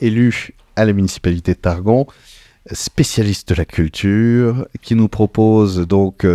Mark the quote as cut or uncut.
uncut